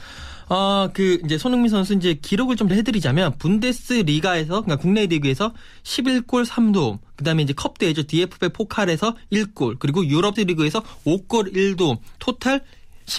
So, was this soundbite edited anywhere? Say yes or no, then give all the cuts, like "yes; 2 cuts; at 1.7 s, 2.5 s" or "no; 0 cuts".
yes; 2 cuts; at 2.7 s, 10.3 s